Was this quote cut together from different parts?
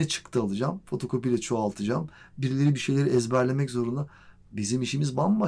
no; 0 cuts

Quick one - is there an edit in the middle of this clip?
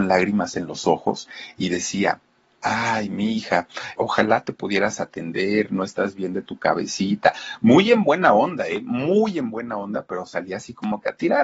yes; 2 cuts; at 4.0 s, 10.1 s

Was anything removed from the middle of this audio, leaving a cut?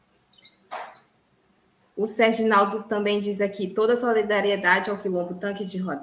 no; 0 cuts

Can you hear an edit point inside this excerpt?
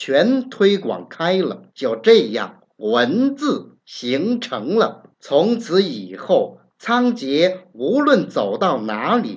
yes; 4 cuts; at 1.7 s, 2.7 s, 3.8 s, 5.1 s

